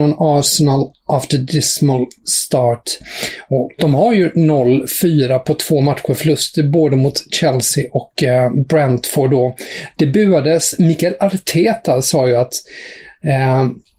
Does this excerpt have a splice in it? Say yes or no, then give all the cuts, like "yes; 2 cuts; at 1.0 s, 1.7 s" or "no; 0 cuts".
no; 0 cuts